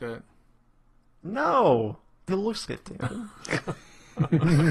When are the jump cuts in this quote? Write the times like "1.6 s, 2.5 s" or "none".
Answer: 2.3 s, 2.7 s